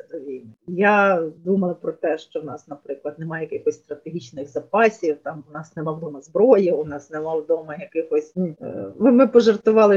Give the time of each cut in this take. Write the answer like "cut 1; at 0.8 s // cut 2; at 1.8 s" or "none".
cut 1; at 1.4 s